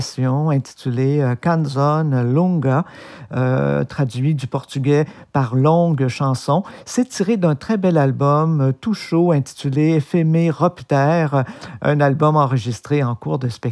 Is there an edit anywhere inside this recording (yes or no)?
no